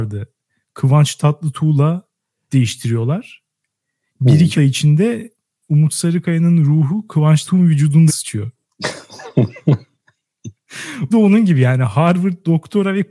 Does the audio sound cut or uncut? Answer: cut